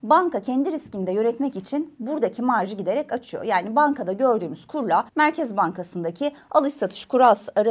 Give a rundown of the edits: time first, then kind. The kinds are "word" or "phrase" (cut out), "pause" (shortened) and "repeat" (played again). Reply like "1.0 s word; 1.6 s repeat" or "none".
5.1 s pause